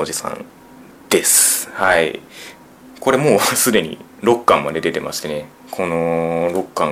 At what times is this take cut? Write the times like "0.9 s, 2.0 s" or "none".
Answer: 5.5 s